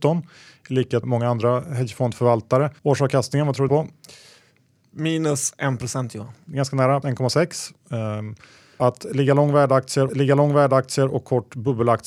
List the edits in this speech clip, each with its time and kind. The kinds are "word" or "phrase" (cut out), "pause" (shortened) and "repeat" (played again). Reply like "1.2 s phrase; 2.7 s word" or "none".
1.0 s word; 2.8 s pause; 3.7 s phrase; 7.0 s word; 8.8 s word; 10.1 s repeat